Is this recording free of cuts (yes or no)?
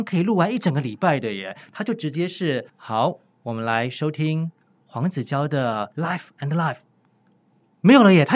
no